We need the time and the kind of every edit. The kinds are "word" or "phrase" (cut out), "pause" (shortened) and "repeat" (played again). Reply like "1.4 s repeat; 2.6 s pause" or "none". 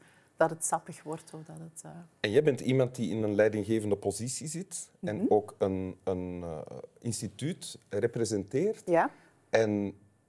none